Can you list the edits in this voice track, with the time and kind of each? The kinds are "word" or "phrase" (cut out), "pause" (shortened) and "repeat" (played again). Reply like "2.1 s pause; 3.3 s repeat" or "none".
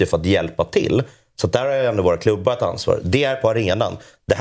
none